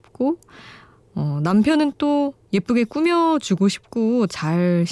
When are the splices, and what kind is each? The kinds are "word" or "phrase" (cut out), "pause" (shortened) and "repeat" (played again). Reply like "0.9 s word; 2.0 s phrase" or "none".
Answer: 2.4 s pause